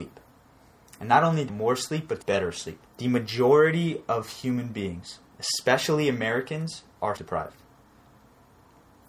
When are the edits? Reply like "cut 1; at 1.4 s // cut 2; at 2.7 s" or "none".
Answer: cut 1; at 1.5 s // cut 2; at 2.2 s // cut 3; at 2.9 s // cut 4; at 7.2 s